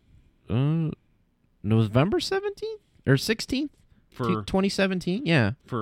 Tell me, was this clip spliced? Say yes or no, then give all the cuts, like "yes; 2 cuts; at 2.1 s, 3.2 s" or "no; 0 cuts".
no; 0 cuts